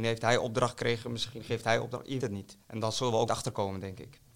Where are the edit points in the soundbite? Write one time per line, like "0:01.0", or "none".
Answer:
0:02.2
0:02.6
0:03.3